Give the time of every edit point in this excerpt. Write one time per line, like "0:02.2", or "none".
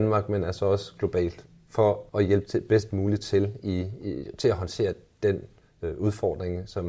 0:02.1